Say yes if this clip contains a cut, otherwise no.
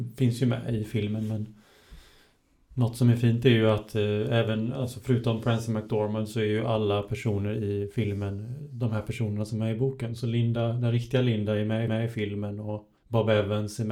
yes